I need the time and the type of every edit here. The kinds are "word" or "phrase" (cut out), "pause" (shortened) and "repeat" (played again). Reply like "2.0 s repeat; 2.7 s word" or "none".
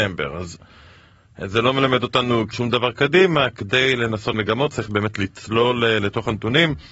2.5 s word; 4.3 s word